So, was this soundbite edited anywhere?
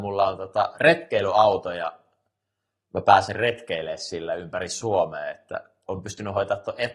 no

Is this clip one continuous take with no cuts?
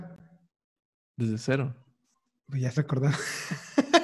no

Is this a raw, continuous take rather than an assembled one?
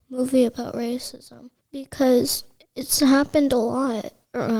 yes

